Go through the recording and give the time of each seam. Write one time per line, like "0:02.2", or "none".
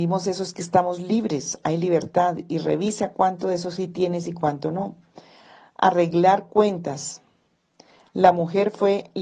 none